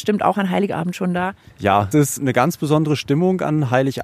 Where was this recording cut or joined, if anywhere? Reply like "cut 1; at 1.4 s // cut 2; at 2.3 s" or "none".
cut 1; at 1.9 s